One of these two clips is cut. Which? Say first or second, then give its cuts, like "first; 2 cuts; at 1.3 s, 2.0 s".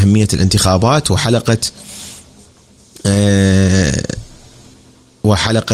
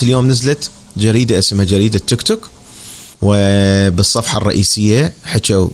second; 1 cut; at 3.1 s